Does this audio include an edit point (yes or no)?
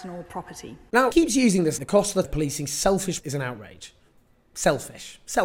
yes